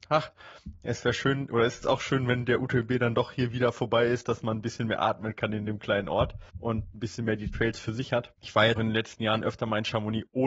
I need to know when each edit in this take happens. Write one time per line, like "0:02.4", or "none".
0:01.8
0:06.5
0:08.4
0:08.8